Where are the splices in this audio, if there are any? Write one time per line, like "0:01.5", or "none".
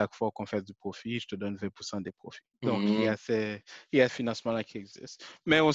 0:02.5
0:04.1